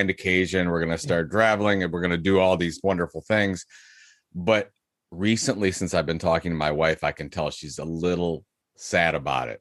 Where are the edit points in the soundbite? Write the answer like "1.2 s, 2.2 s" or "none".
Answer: none